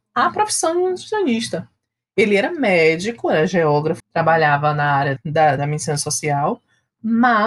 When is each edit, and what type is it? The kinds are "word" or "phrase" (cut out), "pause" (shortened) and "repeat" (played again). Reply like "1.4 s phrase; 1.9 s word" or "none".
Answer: 4.0 s phrase; 5.2 s word; 5.6 s word